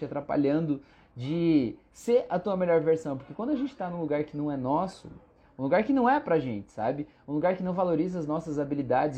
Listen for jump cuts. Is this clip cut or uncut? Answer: uncut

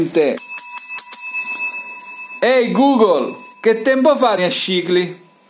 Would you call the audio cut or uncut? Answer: cut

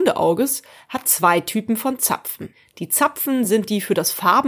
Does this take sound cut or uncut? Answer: uncut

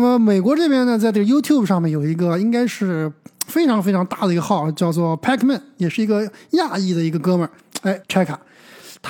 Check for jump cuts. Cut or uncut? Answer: cut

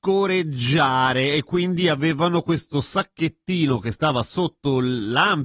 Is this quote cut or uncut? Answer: uncut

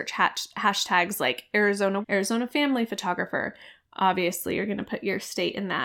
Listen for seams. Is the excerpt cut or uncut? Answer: cut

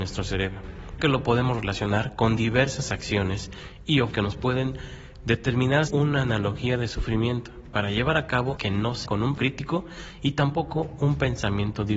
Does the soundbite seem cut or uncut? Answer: cut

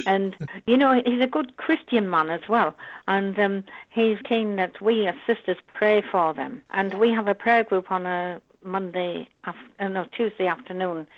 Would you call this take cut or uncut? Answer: cut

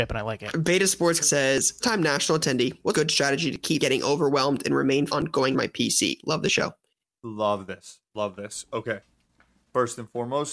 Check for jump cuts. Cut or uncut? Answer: cut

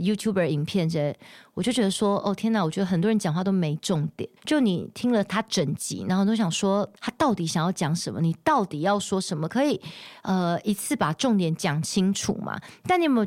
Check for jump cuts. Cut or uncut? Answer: cut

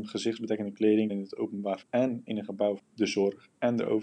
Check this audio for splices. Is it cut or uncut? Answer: cut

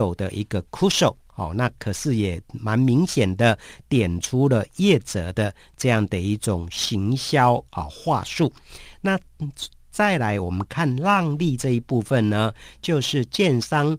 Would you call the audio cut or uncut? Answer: cut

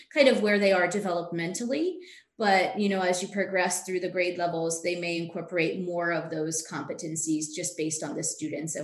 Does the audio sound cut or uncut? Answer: uncut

